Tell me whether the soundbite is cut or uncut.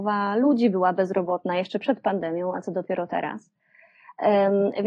uncut